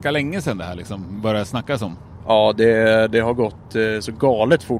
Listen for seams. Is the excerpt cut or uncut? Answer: uncut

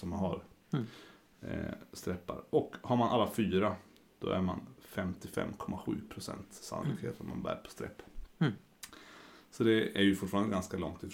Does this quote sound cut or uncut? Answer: uncut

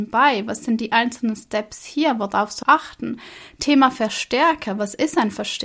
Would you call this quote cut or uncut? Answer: cut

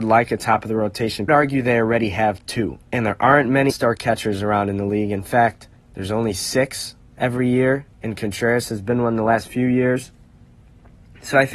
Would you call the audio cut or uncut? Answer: cut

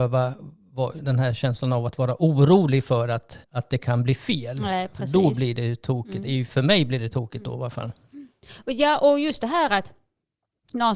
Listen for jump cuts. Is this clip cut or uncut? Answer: cut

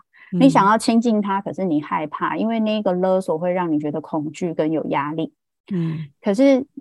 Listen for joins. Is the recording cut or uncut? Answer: uncut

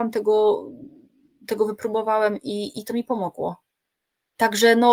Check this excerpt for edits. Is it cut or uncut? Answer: uncut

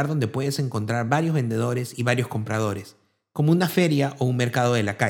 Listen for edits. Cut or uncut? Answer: uncut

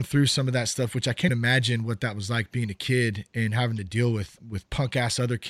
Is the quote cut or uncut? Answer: cut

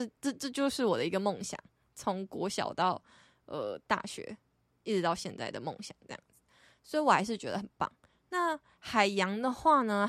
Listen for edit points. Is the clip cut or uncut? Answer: uncut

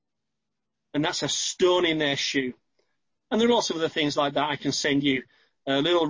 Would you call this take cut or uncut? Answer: uncut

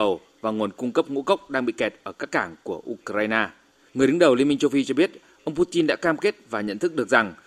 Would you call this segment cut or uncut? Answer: uncut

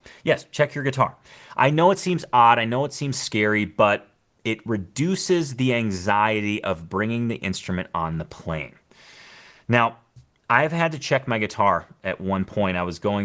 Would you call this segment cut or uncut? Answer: uncut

